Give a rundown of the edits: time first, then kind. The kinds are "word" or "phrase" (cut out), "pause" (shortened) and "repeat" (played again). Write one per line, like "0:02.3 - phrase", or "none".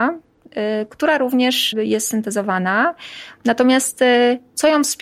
0:01.7 - word